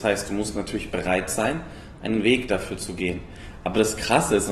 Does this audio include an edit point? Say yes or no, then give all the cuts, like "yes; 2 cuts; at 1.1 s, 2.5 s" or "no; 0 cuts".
no; 0 cuts